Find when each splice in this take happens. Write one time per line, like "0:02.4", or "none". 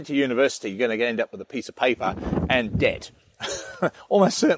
none